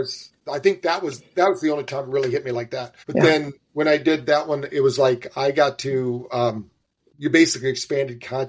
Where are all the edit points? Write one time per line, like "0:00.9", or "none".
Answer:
0:03.0
0:06.8